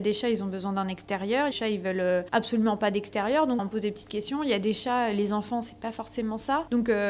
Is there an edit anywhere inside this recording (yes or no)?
yes